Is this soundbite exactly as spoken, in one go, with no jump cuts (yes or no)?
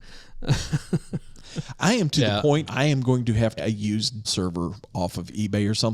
no